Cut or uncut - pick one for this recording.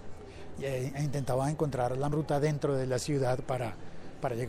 cut